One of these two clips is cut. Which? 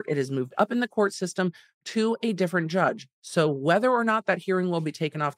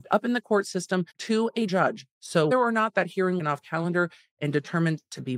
second; 4 cuts; at 1.1 s, 1.7 s, 2.5 s, 3.4 s

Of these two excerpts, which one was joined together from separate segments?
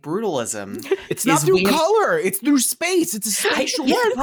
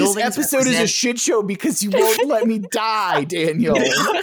second; 1 cut; at 2.2 s

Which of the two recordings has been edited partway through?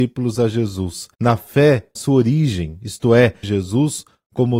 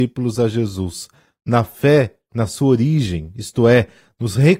first; 3 cuts; at 1.1 s, 2.0 s, 3.4 s

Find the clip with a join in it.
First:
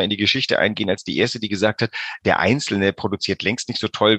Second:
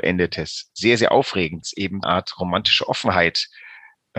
second; 2 cuts; at 1.6 s, 2.0 s

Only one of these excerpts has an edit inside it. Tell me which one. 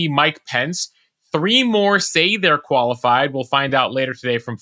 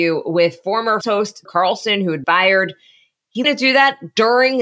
second; 4 cuts; at 1.0 s, 1.5 s, 2.2 s, 3.4 s

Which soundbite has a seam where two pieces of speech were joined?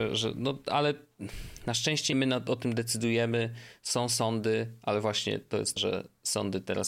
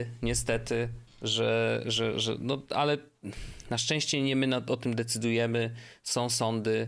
first; 2 cuts; at 2.1 s, 5.8 s

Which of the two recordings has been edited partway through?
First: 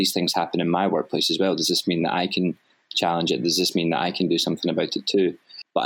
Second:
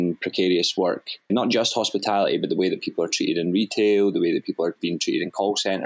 second; 1 cut; at 1.3 s

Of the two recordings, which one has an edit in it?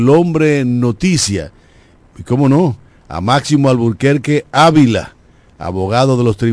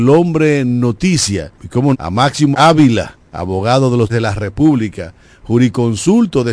second; 5 cuts; at 1.5 s, 1.9 s, 2.5 s, 3.3 s, 4.1 s

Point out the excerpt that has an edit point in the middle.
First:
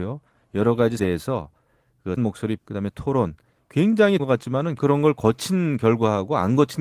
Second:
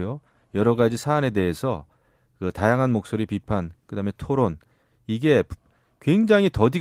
first; 6 cuts; at 1.0 s, 2.2 s, 2.6 s, 3.6 s, 4.2 s, 4.8 s

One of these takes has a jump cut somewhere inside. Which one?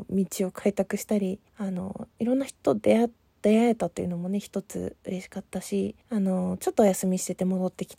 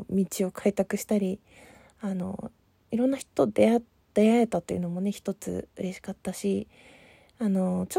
first; 3 cuts; at 1.5 s, 2.1 s, 6.0 s

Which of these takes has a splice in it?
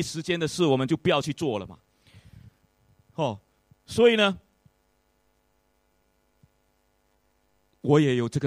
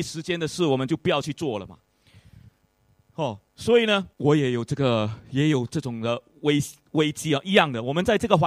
second; 2 cuts; at 3.5 s, 4.1 s

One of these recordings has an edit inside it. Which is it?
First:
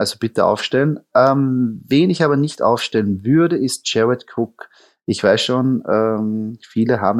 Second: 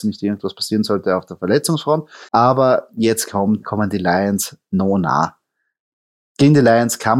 second; 2 cuts; at 2.3 s, 3.6 s

